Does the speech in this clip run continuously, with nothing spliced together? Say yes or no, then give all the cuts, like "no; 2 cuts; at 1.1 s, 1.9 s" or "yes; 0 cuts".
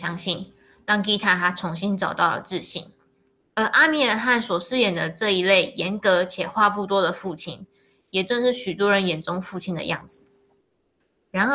yes; 0 cuts